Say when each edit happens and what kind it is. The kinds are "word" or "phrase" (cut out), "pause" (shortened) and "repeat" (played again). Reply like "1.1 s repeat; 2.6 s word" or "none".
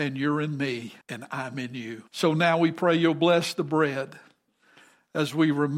1.0 s pause; 2.1 s pause

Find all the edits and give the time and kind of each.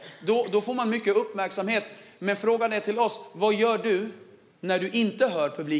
none

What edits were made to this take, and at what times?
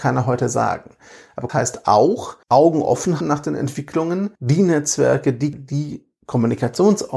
1.5 s word; 2.4 s pause; 3.2 s word; 4.4 s pause; 5.5 s word

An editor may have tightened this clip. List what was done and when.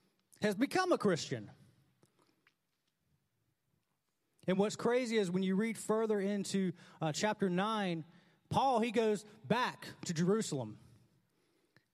none

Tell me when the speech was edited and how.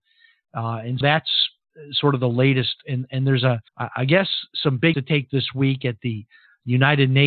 1.0 s word; 3.7 s pause; 4.9 s word; 5.3 s word

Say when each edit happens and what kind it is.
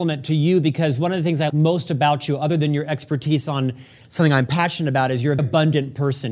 1.5 s word; 5.4 s word

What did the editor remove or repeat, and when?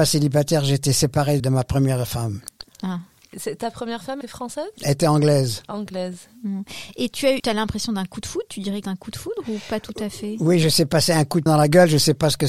1.4 s word; 4.2 s word; 7.4 s word; 8.8 s word; 11.5 s word

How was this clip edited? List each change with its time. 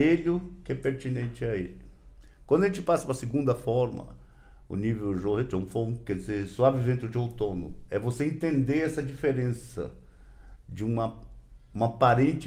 none

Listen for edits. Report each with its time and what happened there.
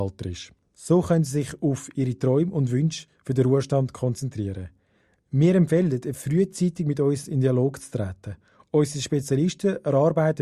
none

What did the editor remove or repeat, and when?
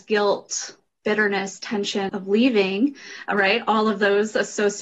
2.1 s word

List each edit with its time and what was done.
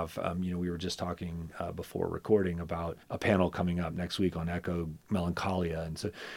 3.0 s pause

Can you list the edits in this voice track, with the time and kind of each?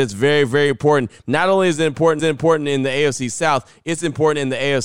2.2 s repeat

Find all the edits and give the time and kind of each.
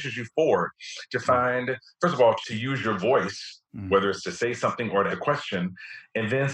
3.7 s pause; 5.1 s word

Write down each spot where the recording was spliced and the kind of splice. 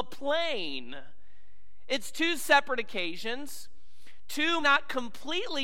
4.6 s word

